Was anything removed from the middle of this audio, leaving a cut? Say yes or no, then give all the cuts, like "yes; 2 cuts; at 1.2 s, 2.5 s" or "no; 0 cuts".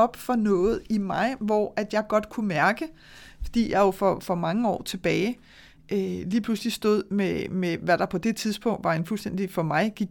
no; 0 cuts